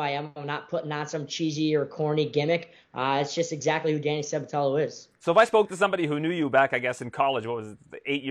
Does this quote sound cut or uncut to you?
cut